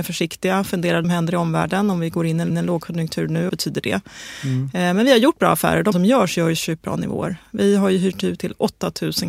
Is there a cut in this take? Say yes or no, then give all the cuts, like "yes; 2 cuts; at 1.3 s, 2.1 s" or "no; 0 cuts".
yes; 6 cuts; at 1.0 s, 2.5 s, 3.5 s, 5.9 s, 6.8 s, 8.4 s